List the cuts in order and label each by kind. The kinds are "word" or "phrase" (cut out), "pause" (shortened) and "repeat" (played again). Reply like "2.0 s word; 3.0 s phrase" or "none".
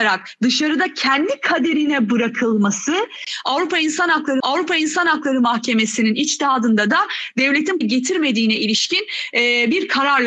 4.4 s repeat; 7.8 s phrase